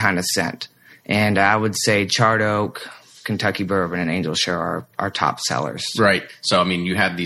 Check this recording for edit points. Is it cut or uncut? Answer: uncut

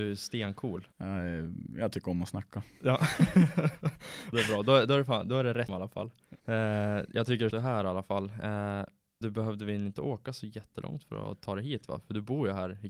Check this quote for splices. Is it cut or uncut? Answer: cut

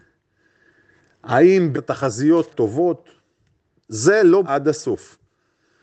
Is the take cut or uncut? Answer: cut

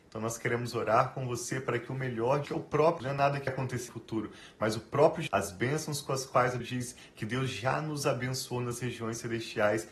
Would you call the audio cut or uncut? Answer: cut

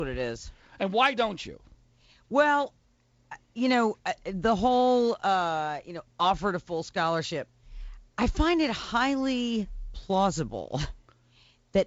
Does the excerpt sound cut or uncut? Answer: uncut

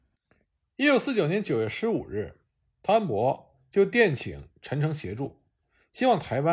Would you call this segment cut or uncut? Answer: uncut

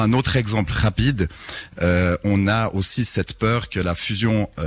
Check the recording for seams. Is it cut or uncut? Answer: uncut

